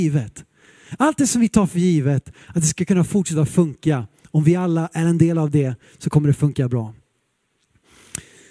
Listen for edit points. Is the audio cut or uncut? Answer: uncut